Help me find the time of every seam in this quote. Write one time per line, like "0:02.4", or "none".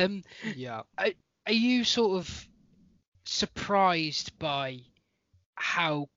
none